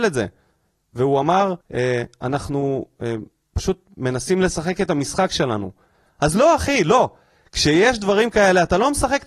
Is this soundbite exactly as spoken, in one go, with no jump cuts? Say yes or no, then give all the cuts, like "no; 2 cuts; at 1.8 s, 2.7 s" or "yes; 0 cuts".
no; 1 cut; at 1.6 s